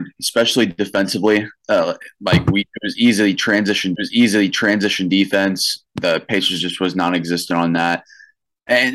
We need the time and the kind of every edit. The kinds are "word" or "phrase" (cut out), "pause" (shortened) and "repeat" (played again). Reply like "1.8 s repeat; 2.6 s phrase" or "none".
3.9 s repeat